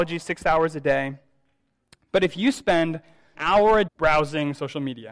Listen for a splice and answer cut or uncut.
cut